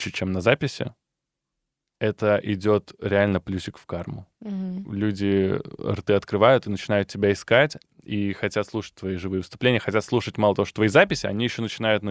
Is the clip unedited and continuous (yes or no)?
yes